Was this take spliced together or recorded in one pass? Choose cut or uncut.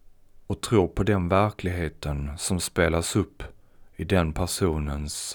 uncut